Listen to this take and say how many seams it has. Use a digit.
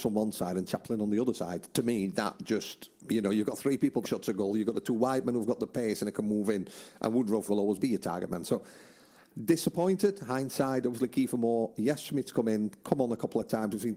3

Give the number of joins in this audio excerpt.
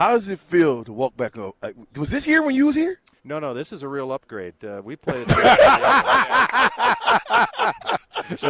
1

